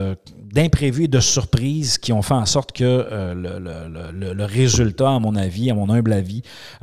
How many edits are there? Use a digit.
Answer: 0